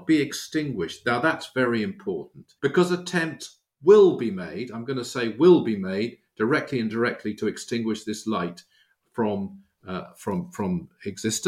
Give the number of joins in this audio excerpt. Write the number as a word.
one